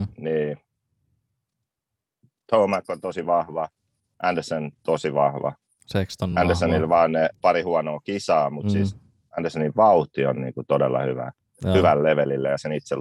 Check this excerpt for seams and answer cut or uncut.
uncut